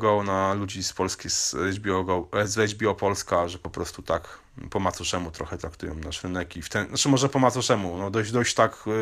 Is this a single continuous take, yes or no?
yes